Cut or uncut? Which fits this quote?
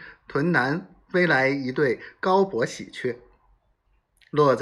cut